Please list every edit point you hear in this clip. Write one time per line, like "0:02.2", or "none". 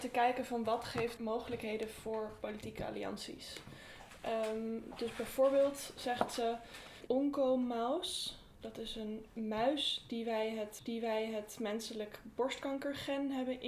0:01.2
0:07.1
0:09.4
0:10.8